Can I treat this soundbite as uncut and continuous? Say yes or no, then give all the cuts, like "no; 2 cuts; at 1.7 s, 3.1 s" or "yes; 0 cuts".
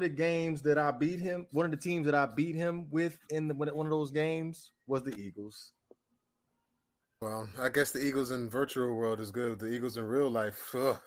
no; 1 cut; at 7.2 s